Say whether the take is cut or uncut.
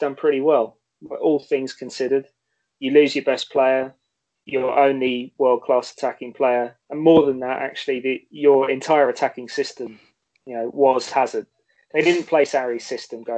uncut